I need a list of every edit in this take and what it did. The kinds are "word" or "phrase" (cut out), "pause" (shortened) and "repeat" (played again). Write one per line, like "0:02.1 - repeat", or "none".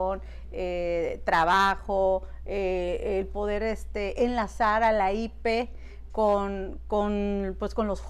none